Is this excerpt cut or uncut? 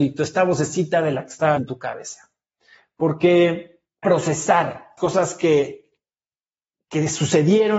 cut